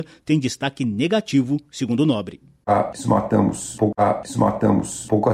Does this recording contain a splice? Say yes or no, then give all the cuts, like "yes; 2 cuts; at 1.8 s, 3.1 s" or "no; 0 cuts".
yes; 1 cut; at 3.9 s